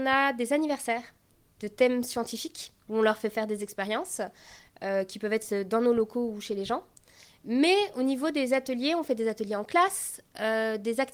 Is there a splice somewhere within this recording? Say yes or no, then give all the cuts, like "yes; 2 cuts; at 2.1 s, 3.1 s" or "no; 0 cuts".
yes; 1 cut; at 2.8 s